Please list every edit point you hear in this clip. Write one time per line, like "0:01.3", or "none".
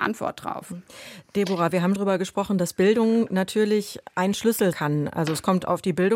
0:02.0
0:04.7